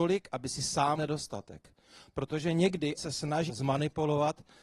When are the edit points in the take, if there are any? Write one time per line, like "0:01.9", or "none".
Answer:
0:01.0
0:03.0
0:03.5